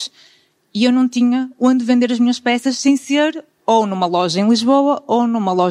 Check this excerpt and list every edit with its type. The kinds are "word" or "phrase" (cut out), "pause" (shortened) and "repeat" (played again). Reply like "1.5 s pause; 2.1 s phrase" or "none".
none